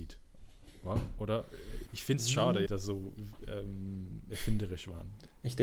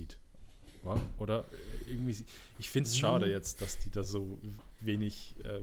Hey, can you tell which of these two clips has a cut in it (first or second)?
first